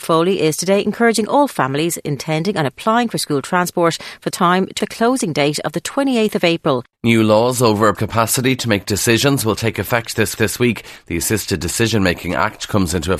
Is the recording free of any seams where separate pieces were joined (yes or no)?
no